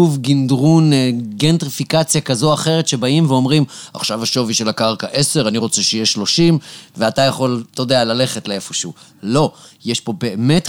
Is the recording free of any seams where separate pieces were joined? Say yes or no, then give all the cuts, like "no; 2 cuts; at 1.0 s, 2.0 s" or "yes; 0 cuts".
yes; 0 cuts